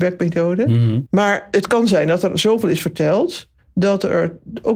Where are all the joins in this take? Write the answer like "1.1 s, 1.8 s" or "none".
3.6 s